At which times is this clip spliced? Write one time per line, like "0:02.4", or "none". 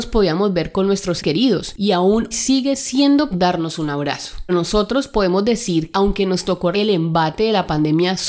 0:01.2
0:02.3
0:03.3
0:04.5
0:05.9
0:06.7